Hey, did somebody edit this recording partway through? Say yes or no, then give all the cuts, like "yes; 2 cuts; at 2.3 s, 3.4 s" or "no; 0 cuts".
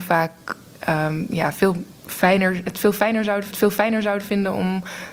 yes; 2 cuts; at 2.0 s, 3.5 s